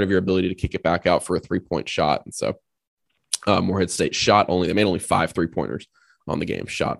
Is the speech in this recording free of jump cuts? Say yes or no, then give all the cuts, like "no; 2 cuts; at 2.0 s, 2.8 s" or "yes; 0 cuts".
yes; 0 cuts